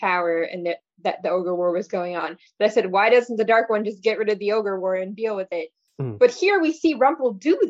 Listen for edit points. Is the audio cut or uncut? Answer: uncut